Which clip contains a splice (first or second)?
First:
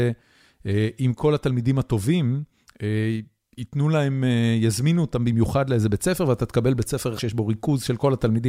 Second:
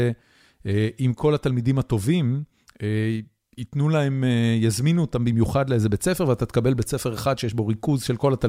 first